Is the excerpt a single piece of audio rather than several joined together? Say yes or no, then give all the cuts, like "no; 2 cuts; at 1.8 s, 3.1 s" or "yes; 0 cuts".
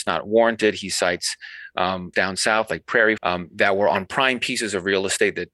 no; 2 cuts; at 2.1 s, 3.2 s